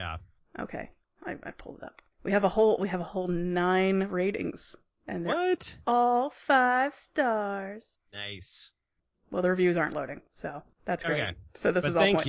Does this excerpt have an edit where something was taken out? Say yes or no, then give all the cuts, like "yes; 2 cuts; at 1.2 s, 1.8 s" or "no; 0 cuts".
no; 0 cuts